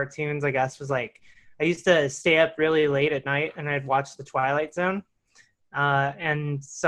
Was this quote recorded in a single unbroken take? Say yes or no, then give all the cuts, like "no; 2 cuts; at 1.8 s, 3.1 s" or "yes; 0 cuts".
yes; 0 cuts